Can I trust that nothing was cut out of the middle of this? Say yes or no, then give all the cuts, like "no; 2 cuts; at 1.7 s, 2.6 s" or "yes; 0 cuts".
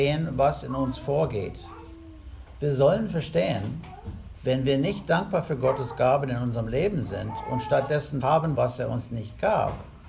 no; 2 cuts; at 8.2 s, 8.5 s